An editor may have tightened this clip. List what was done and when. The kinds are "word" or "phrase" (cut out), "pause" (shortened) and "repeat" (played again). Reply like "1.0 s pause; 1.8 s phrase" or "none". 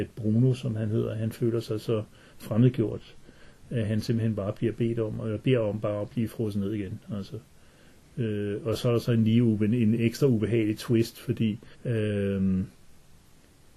11.7 s pause